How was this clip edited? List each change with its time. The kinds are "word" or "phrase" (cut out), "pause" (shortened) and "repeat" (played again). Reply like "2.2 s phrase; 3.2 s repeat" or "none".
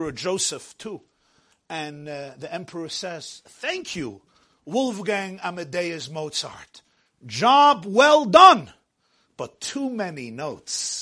none